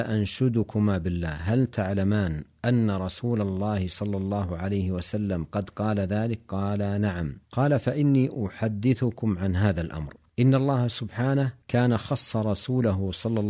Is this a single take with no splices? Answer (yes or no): no